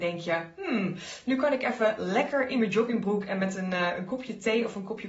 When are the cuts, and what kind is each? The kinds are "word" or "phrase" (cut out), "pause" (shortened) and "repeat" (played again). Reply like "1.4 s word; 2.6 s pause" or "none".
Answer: none